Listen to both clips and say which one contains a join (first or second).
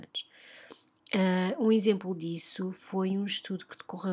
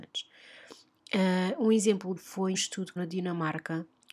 second